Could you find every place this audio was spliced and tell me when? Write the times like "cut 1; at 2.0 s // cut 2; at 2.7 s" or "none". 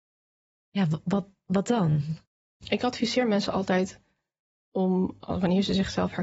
none